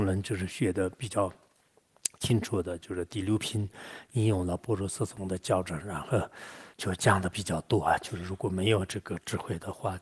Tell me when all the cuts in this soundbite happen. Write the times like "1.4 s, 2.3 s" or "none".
6.7 s

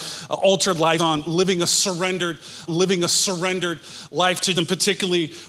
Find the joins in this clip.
1.0 s, 2.7 s, 4.6 s

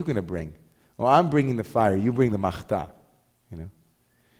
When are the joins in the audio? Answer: none

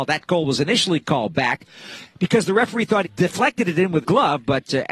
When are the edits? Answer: 3.0 s, 4.0 s

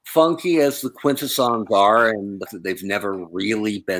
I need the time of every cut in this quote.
2.5 s

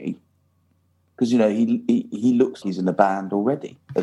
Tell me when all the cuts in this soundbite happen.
2.6 s

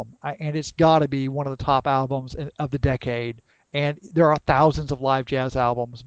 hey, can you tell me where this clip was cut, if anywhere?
none

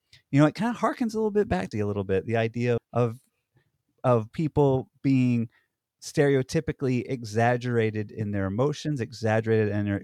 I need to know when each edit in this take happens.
1.7 s, 2.8 s, 4.3 s

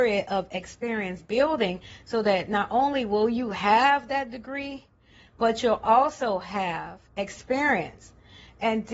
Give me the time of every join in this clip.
7.1 s

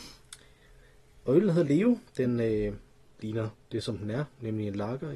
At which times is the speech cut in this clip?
2.1 s

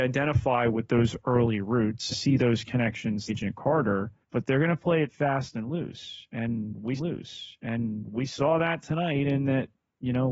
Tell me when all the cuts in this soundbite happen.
2.1 s, 3.3 s, 4.2 s, 7.0 s

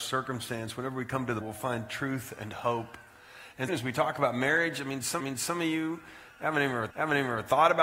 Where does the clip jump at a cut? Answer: 1.4 s, 3.7 s, 5.2 s, 6.9 s

